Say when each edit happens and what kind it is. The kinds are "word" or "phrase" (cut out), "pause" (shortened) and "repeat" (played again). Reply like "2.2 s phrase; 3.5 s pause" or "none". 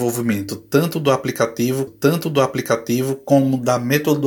1.9 s repeat